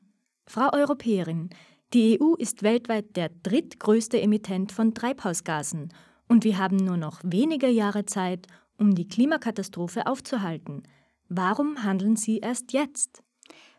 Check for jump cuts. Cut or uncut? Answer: uncut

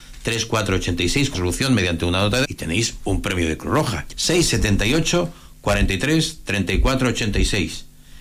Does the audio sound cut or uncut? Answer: cut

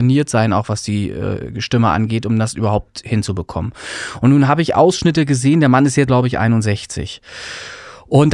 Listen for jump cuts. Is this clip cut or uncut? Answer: cut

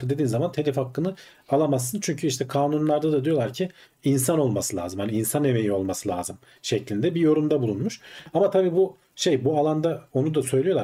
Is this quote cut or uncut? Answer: uncut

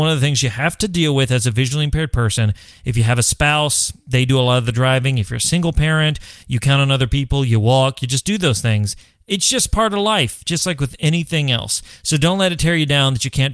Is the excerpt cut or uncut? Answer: uncut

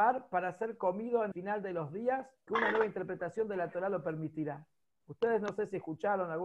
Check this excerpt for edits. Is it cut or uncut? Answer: cut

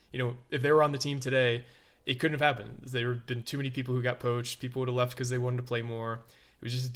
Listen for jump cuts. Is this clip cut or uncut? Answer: uncut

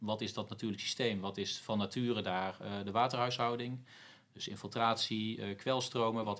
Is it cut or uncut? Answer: uncut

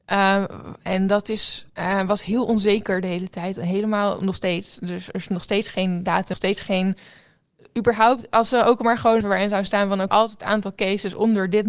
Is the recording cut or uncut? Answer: cut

